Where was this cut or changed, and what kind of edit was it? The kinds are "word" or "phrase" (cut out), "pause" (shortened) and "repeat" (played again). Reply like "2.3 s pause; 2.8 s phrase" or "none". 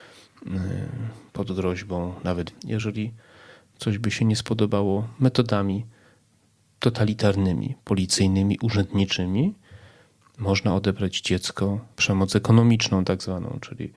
2.5 s word; 11.9 s word

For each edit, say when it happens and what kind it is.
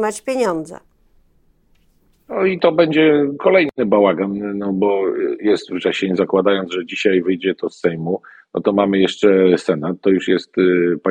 none

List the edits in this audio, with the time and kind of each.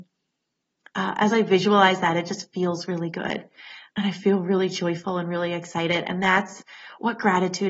none

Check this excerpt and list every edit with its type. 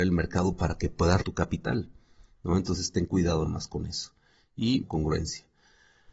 1.2 s word; 3.5 s word; 4.8 s word

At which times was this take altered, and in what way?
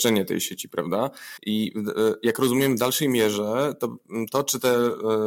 1.4 s pause

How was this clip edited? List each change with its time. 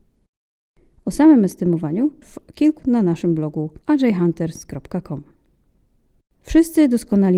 2.2 s word; 2.8 s word; 3.8 s pause

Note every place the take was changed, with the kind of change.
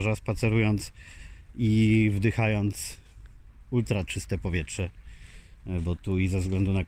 none

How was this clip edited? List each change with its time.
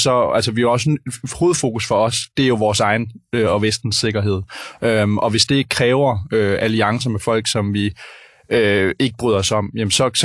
none

